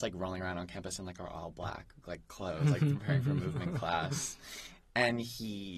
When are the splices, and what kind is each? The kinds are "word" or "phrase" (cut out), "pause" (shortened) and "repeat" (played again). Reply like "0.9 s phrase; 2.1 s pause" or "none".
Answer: none

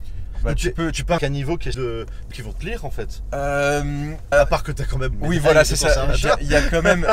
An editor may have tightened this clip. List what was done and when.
1.2 s word; 1.7 s word; 2.3 s word; 4.3 s word; 5.1 s word

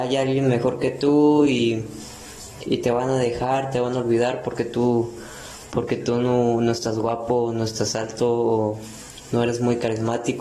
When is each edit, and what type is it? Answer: 2.7 s word

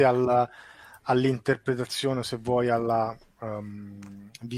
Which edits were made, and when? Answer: none

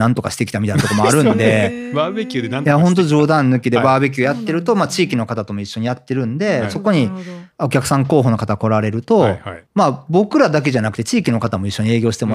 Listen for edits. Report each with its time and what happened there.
7.5 s pause; 9.7 s pause

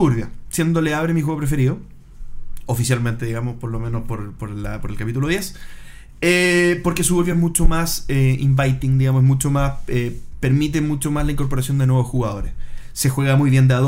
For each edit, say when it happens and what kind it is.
none

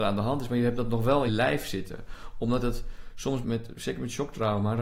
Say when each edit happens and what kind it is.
1.3 s word; 3.4 s word

